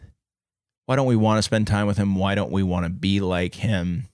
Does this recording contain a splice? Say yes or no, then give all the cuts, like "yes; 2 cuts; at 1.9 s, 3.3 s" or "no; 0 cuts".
no; 0 cuts